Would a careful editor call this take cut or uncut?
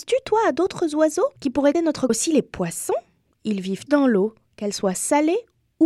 cut